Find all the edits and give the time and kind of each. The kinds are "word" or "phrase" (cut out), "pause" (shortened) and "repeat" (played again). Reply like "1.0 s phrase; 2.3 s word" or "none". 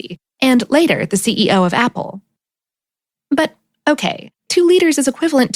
4.4 s pause